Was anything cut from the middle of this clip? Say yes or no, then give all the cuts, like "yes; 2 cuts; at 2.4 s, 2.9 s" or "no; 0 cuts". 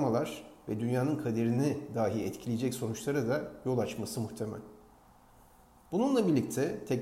no; 0 cuts